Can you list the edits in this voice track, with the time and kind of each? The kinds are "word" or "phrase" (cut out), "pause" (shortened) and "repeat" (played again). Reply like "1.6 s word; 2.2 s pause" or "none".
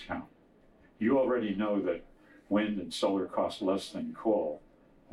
none